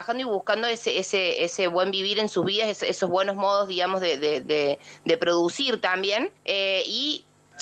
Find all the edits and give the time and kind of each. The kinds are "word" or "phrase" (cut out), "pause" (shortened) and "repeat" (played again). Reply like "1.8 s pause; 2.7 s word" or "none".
6.4 s pause

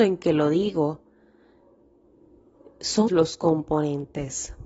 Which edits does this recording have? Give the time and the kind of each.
3.1 s word

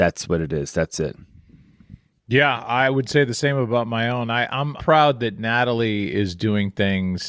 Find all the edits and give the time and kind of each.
4.8 s word

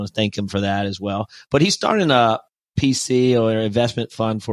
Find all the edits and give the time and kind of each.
none

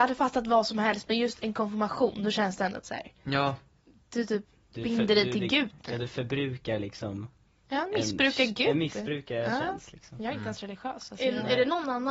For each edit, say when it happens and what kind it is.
none

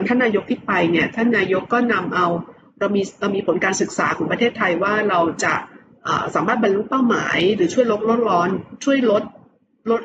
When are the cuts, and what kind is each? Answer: none

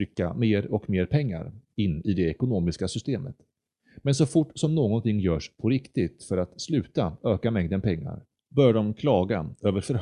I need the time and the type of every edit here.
none

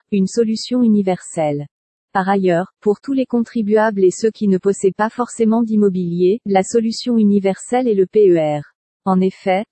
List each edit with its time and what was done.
none

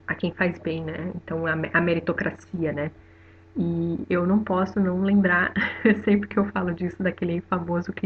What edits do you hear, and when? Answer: none

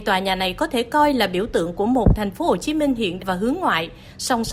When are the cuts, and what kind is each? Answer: 3.2 s word

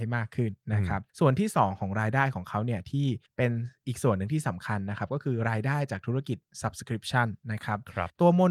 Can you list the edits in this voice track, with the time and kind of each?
none

